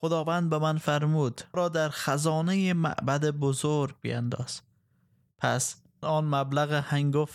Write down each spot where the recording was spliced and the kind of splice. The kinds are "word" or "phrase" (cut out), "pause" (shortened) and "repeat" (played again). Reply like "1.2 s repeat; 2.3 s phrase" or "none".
1.5 s word; 6.0 s word

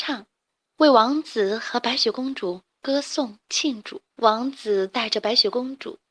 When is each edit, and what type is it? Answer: 4.1 s pause

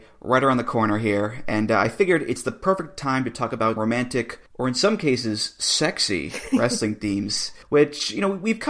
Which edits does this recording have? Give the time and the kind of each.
3.8 s word; 4.5 s pause; 7.6 s pause

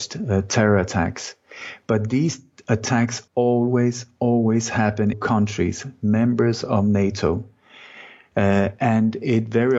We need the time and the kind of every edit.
3.3 s word; 5.1 s phrase

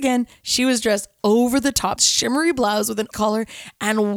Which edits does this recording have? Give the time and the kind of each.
2.0 s phrase; 3.1 s phrase

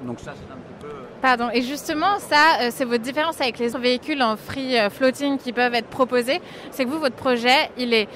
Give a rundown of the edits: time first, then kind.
3.7 s word

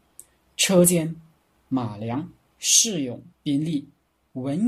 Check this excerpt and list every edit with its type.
3.3 s pause

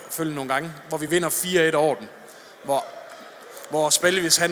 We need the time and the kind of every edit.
none

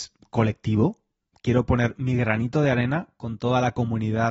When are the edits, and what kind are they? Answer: none

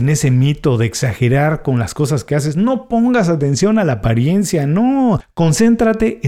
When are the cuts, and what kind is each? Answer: none

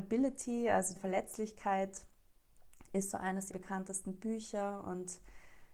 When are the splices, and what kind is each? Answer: 1.0 s phrase; 3.5 s word

